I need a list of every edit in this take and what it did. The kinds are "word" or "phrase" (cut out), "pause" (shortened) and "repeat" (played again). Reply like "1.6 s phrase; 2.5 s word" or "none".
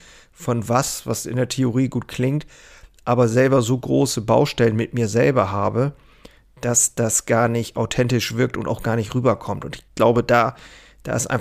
9.9 s pause